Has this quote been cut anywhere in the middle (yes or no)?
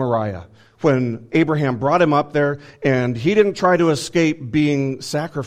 no